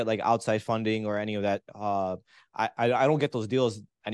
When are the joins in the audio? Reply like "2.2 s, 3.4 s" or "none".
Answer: none